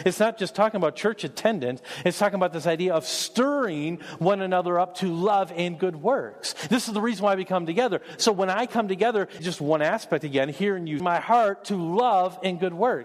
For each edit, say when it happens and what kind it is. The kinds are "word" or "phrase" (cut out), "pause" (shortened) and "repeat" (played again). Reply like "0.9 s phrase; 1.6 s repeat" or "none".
9.4 s word; 11.0 s phrase